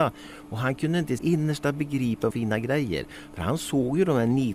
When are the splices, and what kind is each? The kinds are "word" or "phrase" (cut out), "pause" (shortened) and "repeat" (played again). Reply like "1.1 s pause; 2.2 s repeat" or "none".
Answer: 1.2 s word; 2.3 s phrase